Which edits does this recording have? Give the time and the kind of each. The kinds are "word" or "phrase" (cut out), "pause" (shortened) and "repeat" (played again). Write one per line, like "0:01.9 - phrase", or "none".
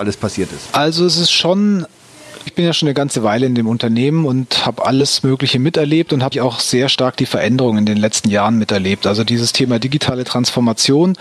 0:02.5 - word
0:06.3 - word